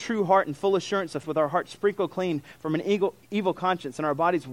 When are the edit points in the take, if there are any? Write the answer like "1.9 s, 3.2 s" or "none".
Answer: 1.2 s, 3.2 s